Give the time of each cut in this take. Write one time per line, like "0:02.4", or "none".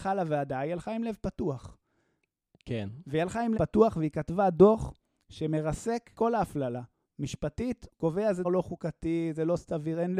0:03.6
0:06.1
0:08.4